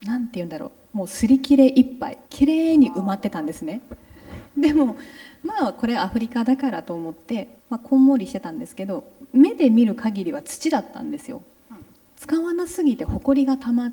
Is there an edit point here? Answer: yes; 2 cuts; at 2.2 s, 7.6 s

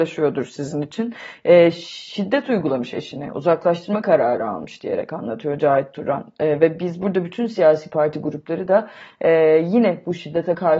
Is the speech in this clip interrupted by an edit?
no; 0 cuts

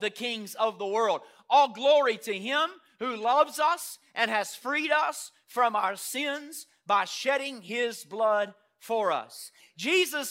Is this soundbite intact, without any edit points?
yes; 0 cuts

